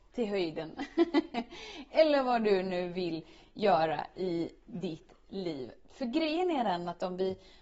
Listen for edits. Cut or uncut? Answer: uncut